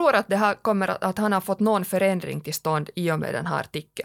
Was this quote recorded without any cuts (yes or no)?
yes